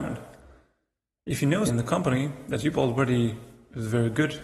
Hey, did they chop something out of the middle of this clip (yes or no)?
yes